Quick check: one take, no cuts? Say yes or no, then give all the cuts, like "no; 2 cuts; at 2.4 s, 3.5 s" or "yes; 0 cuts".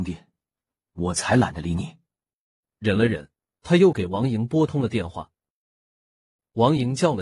yes; 0 cuts